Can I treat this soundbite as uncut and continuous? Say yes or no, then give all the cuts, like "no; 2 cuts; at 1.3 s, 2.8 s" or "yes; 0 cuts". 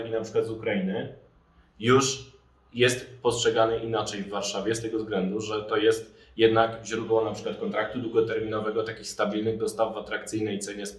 yes; 0 cuts